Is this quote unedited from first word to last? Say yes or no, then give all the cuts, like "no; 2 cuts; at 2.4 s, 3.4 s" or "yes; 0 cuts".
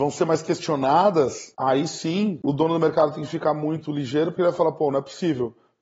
yes; 0 cuts